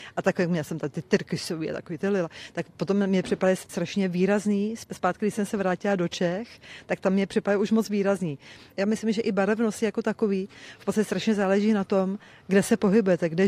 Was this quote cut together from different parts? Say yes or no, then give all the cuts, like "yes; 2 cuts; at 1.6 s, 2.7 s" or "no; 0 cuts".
no; 0 cuts